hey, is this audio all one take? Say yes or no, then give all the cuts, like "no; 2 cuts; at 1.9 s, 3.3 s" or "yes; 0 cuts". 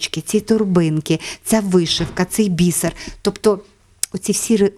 yes; 0 cuts